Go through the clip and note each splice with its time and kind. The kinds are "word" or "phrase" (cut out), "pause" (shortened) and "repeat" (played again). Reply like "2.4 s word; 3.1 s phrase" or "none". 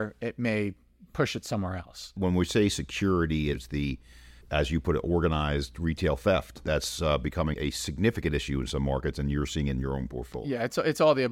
4.4 s pause; 7.5 s word